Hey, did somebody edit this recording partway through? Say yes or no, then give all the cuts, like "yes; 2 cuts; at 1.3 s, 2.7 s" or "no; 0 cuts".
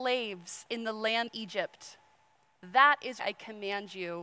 yes; 2 cuts; at 1.3 s, 3.2 s